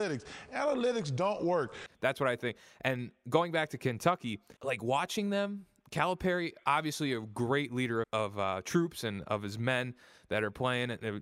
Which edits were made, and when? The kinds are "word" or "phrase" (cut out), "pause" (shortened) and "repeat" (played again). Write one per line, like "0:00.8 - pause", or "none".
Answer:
0:01.9 - pause
0:04.6 - pause
0:08.0 - word